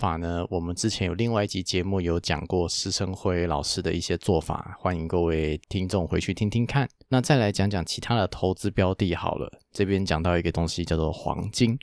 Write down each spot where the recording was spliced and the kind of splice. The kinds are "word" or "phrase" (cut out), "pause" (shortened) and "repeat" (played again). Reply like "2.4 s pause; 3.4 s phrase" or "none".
5.6 s pause